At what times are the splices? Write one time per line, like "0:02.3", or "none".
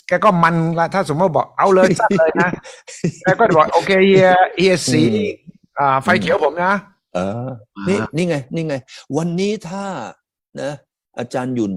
none